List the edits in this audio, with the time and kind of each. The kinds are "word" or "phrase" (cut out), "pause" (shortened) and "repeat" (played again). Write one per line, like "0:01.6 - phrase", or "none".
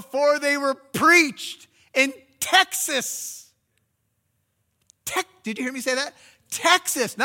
none